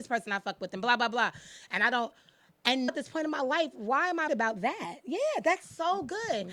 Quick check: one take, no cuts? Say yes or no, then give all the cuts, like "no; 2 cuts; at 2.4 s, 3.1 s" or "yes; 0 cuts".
no; 2 cuts; at 2.9 s, 4.3 s